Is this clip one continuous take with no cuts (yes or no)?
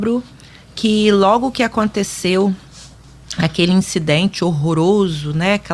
yes